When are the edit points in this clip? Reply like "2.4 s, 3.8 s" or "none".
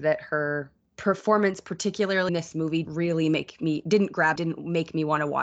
2.3 s, 2.8 s, 4.4 s